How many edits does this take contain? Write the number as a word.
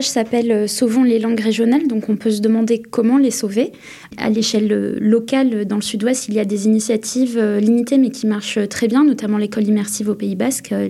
zero